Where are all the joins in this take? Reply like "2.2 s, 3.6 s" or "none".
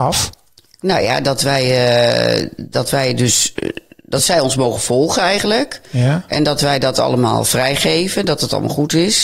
none